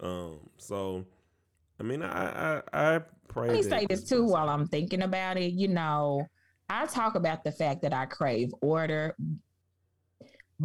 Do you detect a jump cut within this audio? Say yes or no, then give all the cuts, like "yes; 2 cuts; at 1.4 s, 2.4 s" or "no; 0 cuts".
no; 0 cuts